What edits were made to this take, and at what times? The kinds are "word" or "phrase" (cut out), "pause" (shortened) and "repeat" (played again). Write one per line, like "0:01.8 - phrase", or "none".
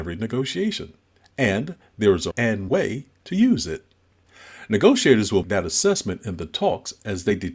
0:02.3 - word
0:02.7 - word
0:05.4 - word

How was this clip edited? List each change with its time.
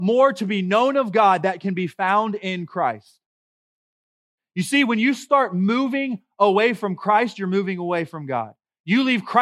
none

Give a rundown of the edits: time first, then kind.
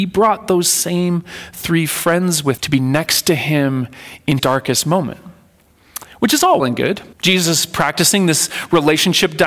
0:02.6 - word
0:04.4 - word
0:06.6 - word
0:07.1 - pause

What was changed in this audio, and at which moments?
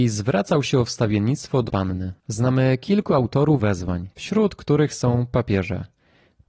0:01.7 - word
0:02.2 - pause
0:03.6 - word
0:04.1 - pause

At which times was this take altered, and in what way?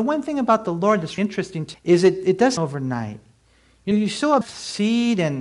0:01.2 - word
0:01.7 - word
0:02.6 - word
0:03.9 - word
0:04.4 - word

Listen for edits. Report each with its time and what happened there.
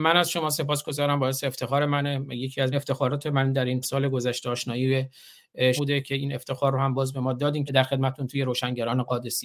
0:02.7 - word
0:03.8 - word
0:05.8 - word
0:07.7 - word

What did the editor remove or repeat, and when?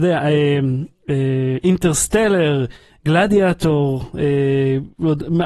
none

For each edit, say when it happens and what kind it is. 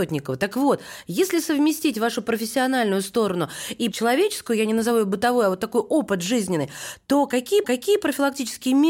0:03.9 - word
0:07.6 - repeat

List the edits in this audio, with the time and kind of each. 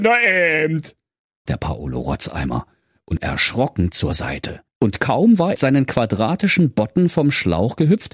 0:01.5 - word
0:03.2 - word
0:04.7 - pause
0:05.6 - phrase

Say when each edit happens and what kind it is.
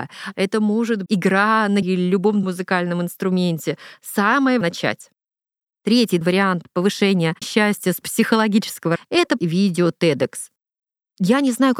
0:01.1 - word
0:01.8 - word
0:02.4 - word
0:04.6 - word
0:06.2 - word
0:07.4 - word
0:08.0 - word
0:09.0 - word
0:09.4 - word

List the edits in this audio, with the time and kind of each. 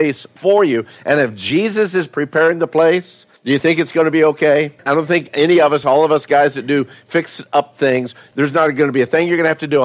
0:03.4 - pause
0:04.8 - pause

